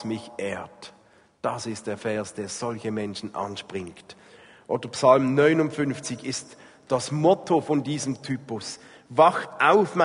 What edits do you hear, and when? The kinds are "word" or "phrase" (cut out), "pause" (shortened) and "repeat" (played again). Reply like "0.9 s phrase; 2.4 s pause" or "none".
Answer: none

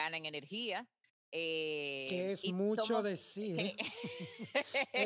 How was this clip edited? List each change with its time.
none

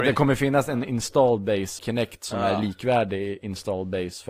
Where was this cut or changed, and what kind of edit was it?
1.8 s word

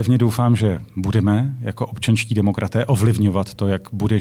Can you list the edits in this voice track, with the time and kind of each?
none

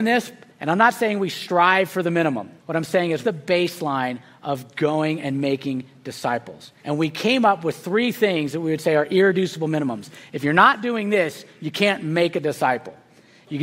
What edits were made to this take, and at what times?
2.6 s pause; 3.2 s word; 6.8 s pause

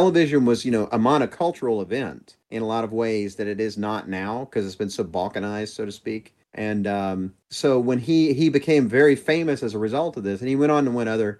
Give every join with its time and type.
2.4 s pause; 6.4 s pause; 7.4 s pause

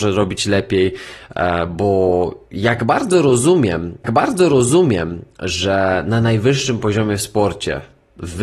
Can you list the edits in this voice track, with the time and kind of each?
4.0 s repeat

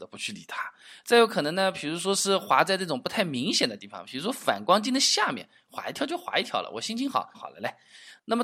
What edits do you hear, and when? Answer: 7.3 s phrase

